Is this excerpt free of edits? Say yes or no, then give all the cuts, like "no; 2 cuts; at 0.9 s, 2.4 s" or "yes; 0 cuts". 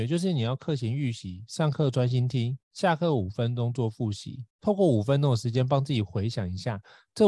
no; 2 cuts; at 2.6 s, 4.5 s